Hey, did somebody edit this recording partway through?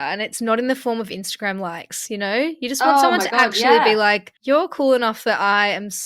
yes; 1 cut; at 4.4 s

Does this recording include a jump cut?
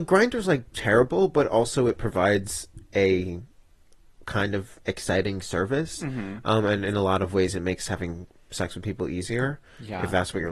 no; 0 cuts

